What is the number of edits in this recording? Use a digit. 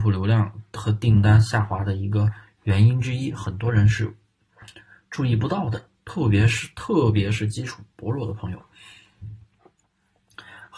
0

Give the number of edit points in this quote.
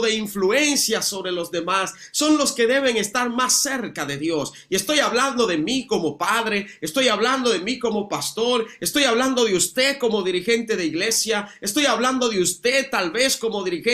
0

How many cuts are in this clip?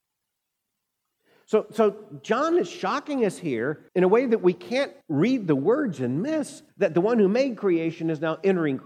3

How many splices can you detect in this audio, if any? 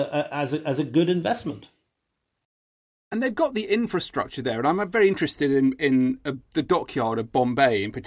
0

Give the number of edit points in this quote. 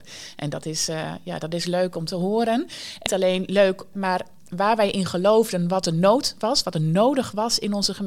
2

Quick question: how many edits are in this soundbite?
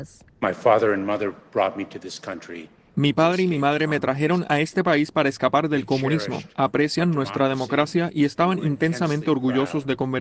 0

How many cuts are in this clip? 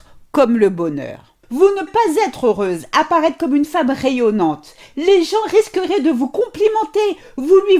2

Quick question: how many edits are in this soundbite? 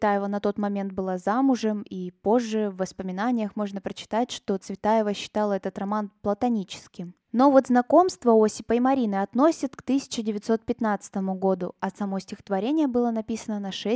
1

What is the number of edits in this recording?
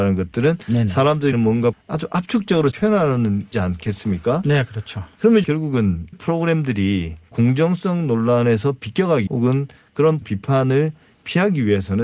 9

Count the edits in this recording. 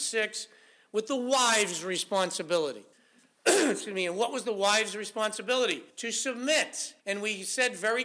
3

